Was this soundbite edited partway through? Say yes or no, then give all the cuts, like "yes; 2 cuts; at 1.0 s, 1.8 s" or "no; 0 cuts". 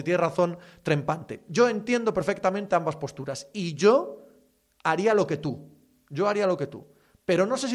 no; 0 cuts